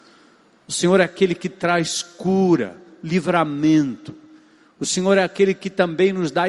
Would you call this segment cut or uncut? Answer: uncut